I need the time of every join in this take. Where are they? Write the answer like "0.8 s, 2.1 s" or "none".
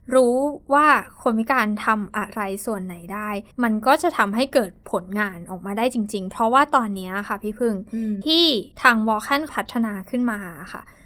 3.5 s, 8.2 s, 8.7 s, 9.5 s